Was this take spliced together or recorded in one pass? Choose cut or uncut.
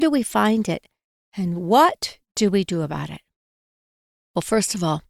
uncut